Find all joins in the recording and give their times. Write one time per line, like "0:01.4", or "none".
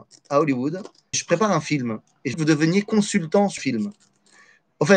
0:01.1
0:02.3
0:03.6